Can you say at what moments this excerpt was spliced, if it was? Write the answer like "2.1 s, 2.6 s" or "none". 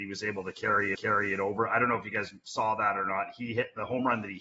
0.9 s